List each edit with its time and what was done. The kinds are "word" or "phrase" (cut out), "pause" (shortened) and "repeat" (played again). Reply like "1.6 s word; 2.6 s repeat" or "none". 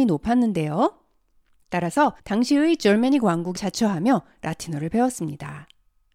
2.2 s pause; 3.6 s phrase